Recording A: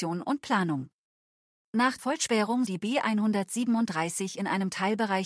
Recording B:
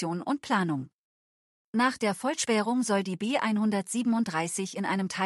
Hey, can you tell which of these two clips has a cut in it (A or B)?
A